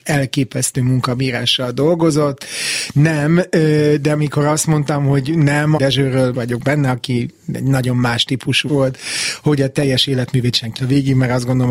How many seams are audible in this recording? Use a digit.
4